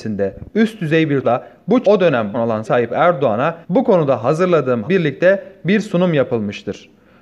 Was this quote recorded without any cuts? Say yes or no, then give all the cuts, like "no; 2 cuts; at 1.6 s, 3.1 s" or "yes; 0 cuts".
no; 6 cuts; at 1.2 s, 1.8 s, 2.3 s, 2.6 s, 3.6 s, 4.9 s